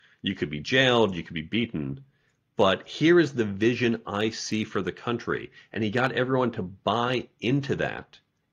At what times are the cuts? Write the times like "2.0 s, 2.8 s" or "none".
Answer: none